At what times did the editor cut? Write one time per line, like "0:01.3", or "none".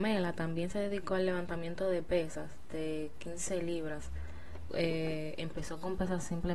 0:04.7